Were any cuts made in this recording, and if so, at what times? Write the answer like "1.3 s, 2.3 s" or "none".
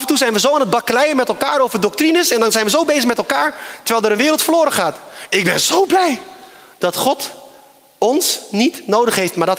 none